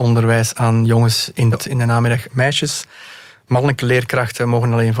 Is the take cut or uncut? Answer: cut